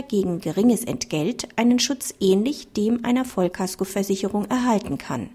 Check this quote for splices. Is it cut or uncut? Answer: uncut